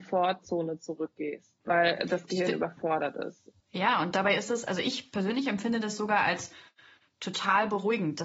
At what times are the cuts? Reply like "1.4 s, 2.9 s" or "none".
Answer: 1.6 s, 3.6 s